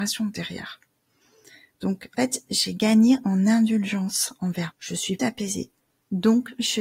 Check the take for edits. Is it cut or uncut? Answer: cut